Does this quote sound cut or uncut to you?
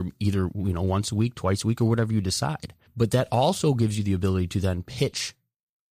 cut